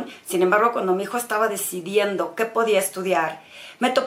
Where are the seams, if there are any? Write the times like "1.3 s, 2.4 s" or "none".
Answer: none